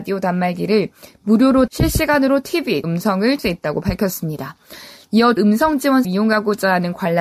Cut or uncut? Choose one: cut